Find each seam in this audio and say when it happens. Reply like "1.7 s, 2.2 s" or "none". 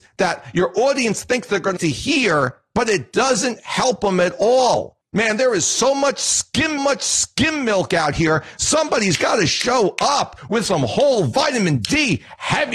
1.8 s, 6.8 s